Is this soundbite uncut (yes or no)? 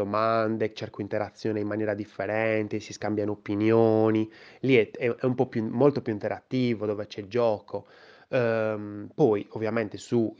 yes